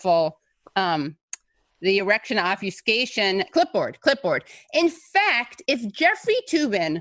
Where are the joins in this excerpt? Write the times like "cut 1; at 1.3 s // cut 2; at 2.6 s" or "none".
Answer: none